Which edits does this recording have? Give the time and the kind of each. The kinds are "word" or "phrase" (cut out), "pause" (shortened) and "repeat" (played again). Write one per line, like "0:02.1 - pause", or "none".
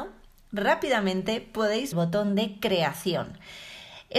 0:01.9 - phrase